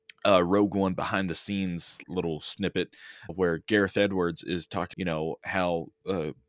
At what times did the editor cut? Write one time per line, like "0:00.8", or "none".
0:02.0
0:03.3
0:04.9